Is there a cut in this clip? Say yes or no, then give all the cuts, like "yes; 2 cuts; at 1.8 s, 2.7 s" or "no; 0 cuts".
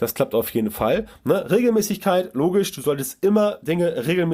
no; 0 cuts